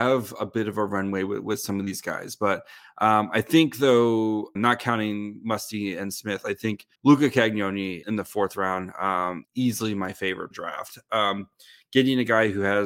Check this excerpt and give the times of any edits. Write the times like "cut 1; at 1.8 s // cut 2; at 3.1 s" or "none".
cut 1; at 4.6 s // cut 2; at 6.9 s // cut 3; at 8.0 s // cut 4; at 9.4 s // cut 5; at 10.5 s